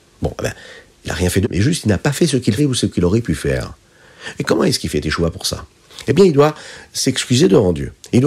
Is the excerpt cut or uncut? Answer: cut